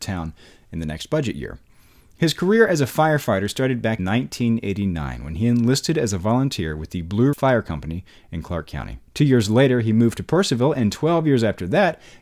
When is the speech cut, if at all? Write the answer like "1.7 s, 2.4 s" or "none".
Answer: 4.0 s, 7.3 s, 9.1 s